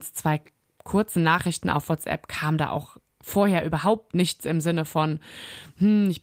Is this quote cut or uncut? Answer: uncut